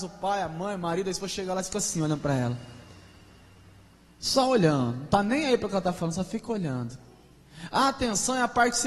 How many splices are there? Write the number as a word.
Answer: zero